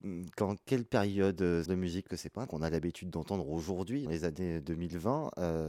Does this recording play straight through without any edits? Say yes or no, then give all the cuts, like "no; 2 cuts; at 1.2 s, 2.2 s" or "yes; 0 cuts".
no; 4 cuts; at 1.7 s, 2.1 s, 2.5 s, 4.1 s